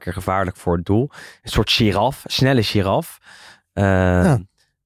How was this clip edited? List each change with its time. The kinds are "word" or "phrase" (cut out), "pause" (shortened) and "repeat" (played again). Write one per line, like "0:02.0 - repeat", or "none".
none